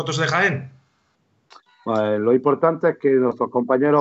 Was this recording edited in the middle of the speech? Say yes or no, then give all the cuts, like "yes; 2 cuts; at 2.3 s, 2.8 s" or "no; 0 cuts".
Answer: no; 0 cuts